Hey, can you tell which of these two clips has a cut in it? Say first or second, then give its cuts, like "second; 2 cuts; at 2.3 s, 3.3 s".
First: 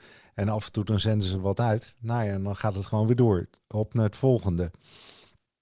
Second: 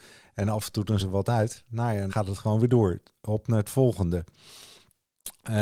second; 2 cuts; at 1.0 s, 2.1 s